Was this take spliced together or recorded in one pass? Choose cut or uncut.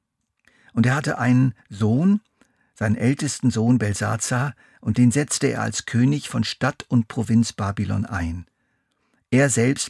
uncut